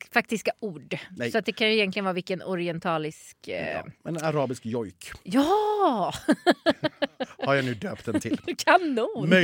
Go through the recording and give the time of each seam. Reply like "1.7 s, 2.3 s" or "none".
5.2 s